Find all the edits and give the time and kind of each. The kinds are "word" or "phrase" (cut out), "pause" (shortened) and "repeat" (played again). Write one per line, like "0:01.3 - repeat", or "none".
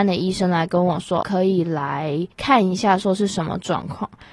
0:01.2 - word
0:02.3 - pause